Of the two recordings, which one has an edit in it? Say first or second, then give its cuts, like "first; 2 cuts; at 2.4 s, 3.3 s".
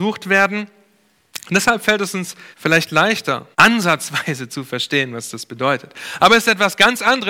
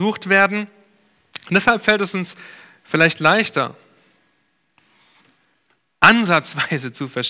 first; 2 cuts; at 2.5 s, 3.5 s